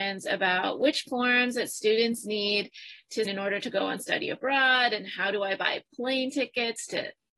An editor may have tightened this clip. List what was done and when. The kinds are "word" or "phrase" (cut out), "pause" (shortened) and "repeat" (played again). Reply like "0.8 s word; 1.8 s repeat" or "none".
1.1 s word; 3.3 s word